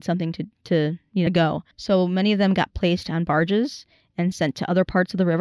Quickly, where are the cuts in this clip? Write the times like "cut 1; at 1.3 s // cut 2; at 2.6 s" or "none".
cut 1; at 1.3 s // cut 2; at 1.7 s

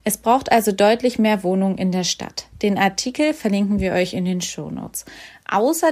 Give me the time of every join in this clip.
none

